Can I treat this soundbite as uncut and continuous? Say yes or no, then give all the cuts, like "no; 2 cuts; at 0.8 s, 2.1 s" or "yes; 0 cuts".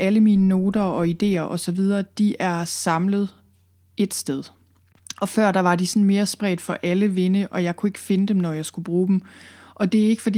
yes; 0 cuts